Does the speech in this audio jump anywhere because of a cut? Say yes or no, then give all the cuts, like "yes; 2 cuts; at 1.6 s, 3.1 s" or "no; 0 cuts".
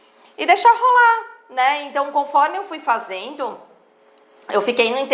no; 0 cuts